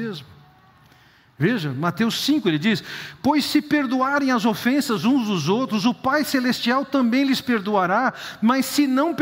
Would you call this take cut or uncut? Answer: uncut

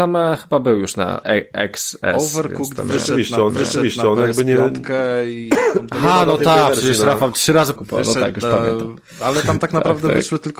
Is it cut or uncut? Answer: cut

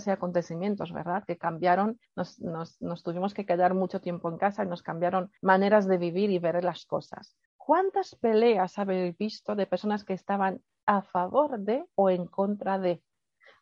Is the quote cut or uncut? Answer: cut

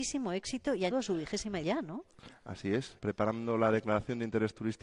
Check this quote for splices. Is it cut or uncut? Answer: cut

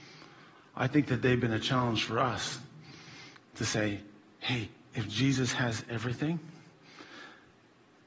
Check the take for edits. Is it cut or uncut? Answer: uncut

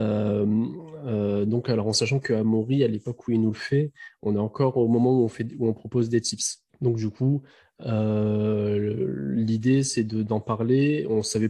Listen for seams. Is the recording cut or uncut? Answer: cut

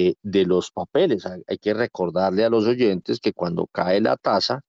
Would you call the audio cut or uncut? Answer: uncut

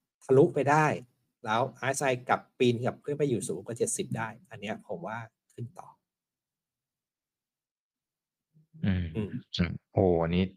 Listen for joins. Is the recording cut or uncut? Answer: uncut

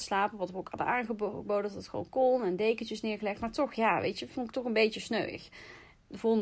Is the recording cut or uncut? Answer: uncut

